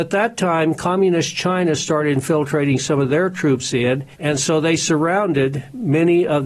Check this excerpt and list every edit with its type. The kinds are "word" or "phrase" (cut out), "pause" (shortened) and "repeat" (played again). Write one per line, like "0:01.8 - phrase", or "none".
0:04.1 - pause